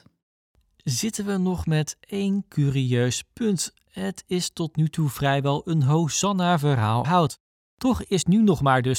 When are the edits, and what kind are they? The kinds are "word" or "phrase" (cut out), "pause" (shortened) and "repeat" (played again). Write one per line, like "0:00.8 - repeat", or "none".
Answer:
0:07.0 - word